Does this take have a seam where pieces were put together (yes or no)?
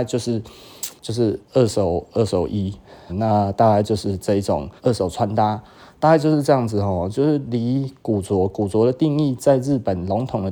yes